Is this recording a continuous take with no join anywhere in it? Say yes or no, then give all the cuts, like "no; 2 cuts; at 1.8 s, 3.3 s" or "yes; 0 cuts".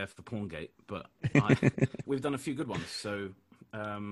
no; 2 cuts; at 1.2 s, 2.0 s